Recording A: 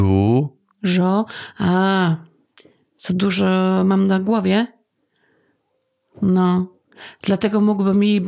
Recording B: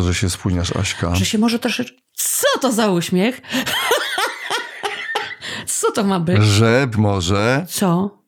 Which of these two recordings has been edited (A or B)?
B